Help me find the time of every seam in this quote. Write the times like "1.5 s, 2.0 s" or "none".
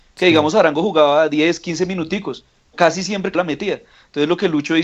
2.7 s, 3.3 s